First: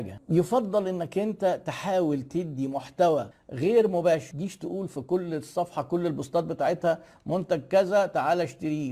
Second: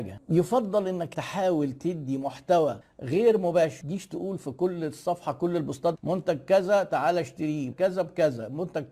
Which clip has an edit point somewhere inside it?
second; 3 cuts; at 1.1 s, 5.9 s, 7.7 s

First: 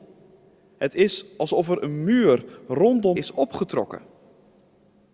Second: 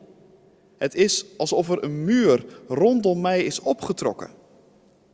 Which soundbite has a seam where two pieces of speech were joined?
first; 1 cut; at 3.2 s

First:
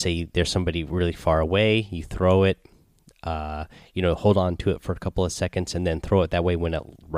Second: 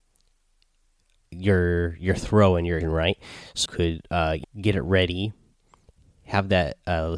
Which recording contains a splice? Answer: second; 3 cuts; at 2.8 s, 3.7 s, 4.4 s

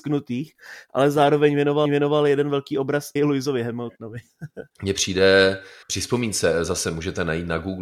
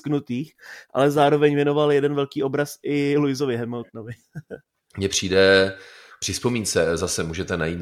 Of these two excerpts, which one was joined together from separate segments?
first; 4 cuts; at 1.9 s, 3.2 s, 4.7 s, 5.8 s

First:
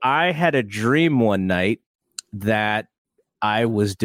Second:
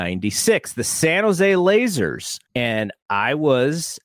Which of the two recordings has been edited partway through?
second; 1 cut; at 2.5 s

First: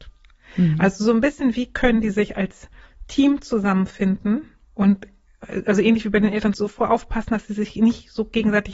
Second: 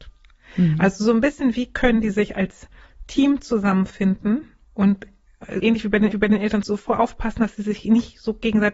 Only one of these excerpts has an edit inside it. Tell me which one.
second; 2 cuts; at 5.6 s, 6.1 s

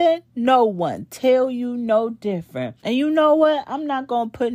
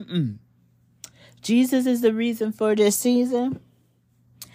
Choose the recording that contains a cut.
first; 1 cut; at 2.8 s

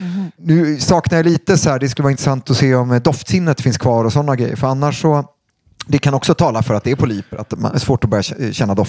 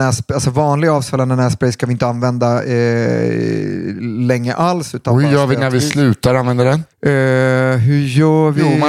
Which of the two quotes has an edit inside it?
second; 1 cut; at 6.9 s

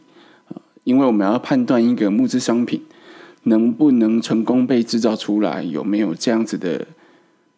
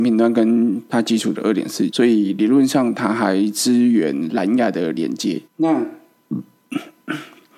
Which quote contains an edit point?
second; 2 cuts; at 1.9 s, 5.5 s

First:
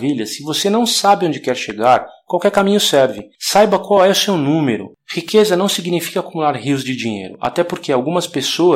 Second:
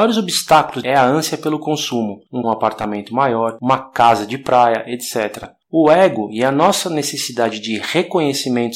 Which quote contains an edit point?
second; 1 cut; at 2.4 s

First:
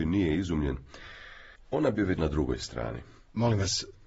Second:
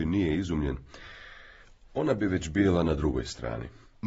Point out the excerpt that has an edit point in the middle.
first; 2 cuts; at 1.6 s, 2.2 s

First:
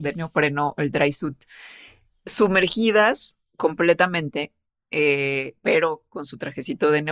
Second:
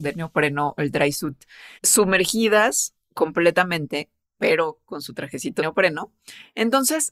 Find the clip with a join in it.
second; 3 cuts; at 1.8 s, 4.4 s, 5.6 s

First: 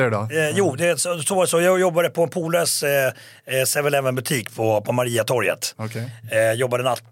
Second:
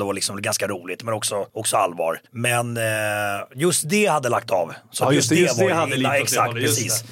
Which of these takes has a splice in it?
second; 2 cuts; at 1.5 s, 2.3 s

